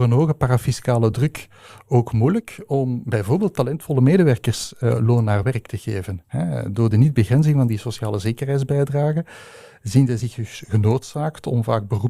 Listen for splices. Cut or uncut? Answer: uncut